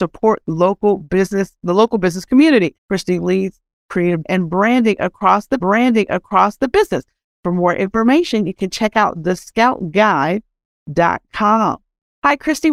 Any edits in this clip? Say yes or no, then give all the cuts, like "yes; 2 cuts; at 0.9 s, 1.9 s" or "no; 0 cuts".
yes; 3 cuts; at 2.8 s, 4.2 s, 5.6 s